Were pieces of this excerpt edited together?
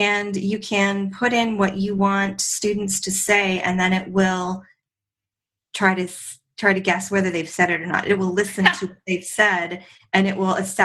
no; 0 cuts

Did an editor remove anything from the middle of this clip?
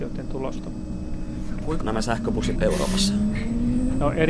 yes; 2 cuts; at 1.8 s, 2.6 s

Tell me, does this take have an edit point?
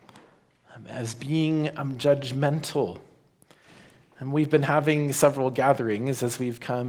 no; 0 cuts

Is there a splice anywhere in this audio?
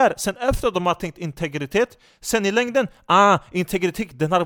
no; 0 cuts

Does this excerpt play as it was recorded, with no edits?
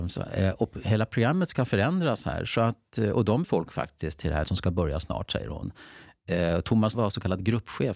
no; 3 cuts; at 3.4 s, 4.4 s, 6.9 s

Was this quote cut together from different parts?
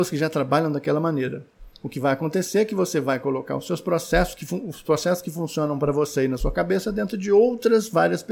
no; 0 cuts

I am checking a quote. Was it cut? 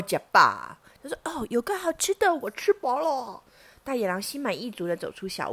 yes; 1 cut; at 3.5 s

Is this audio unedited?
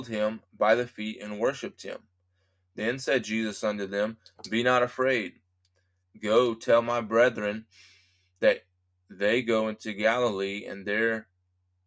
yes; 0 cuts

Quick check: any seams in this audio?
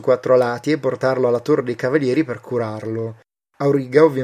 no; 0 cuts

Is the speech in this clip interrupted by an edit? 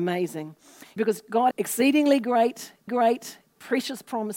yes; 3 cuts; at 1.0 s, 1.5 s, 2.9 s

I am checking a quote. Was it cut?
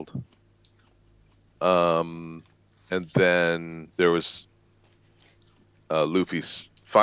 yes; 2 cuts; at 2.6 s, 3.9 s

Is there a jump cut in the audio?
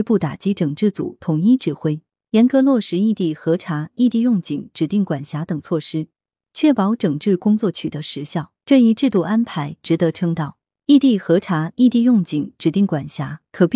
yes; 1 cut; at 8.6 s

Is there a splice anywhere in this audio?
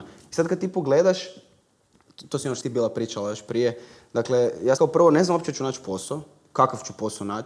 yes; 2 cuts; at 2.6 s, 4.8 s

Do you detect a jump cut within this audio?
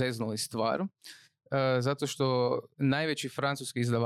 yes; 1 cut; at 2.7 s

